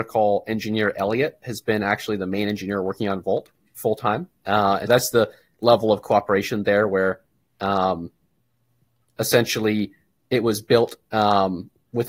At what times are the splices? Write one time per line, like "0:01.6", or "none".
0:04.9

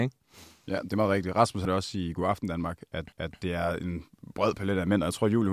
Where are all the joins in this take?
0:01.6
0:03.1

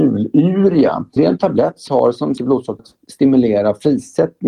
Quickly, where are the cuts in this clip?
0:01.2
0:01.9
0:02.4
0:02.8

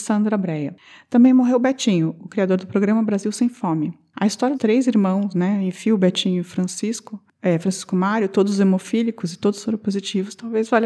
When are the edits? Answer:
0:04.5

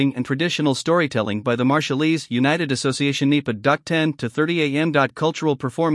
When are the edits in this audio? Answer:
none

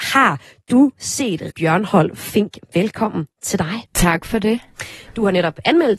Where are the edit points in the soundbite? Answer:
0:01.5
0:03.9

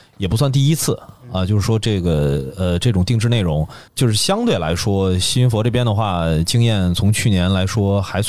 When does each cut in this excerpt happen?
0:03.9

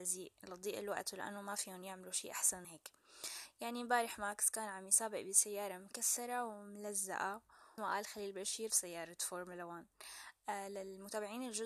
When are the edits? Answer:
0:02.6
0:07.8
0:08.7

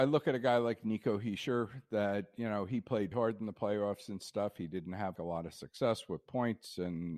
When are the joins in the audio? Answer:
0:03.1
0:05.2

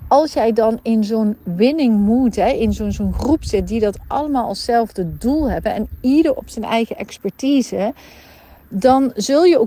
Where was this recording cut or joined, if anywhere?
none

